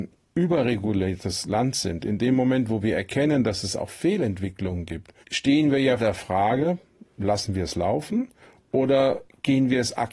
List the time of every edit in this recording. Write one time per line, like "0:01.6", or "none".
0:05.2
0:06.0